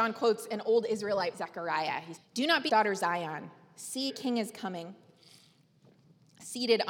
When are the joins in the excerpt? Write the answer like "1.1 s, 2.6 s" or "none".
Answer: 1.3 s, 2.2 s, 2.7 s, 4.1 s